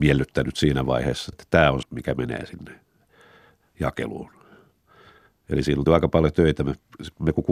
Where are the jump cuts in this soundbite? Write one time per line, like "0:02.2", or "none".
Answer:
0:01.3
0:01.8
0:05.9

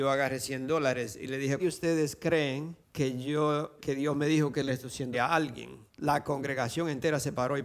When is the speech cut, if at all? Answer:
0:01.6
0:02.8
0:03.8
0:04.7
0:05.1
0:05.9

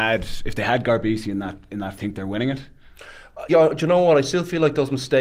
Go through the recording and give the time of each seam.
0:02.0
0:03.5

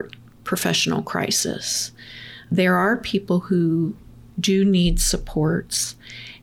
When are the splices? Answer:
none

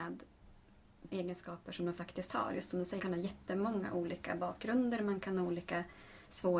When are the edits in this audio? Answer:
0:01.1
0:03.0

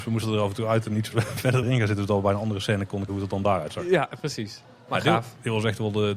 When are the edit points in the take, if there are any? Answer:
0:01.6
0:03.1

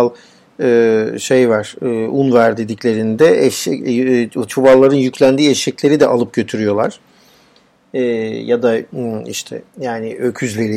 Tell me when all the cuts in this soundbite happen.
0:09.7

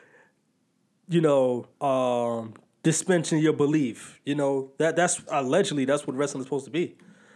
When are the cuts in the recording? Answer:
0:01.7
0:05.3

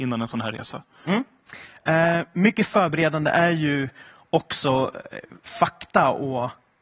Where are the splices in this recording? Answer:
none

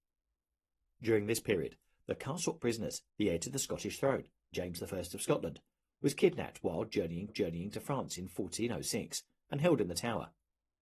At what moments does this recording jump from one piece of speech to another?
0:02.6
0:03.1
0:04.5
0:07.3

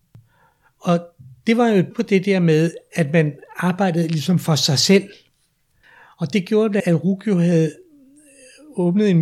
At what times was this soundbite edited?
0:01.9
0:06.8

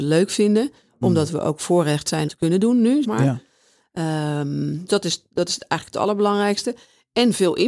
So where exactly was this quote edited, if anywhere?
0:02.3
0:03.0
0:04.9

